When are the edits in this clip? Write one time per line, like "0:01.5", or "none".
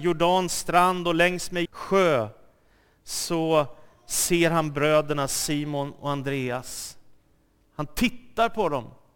0:01.6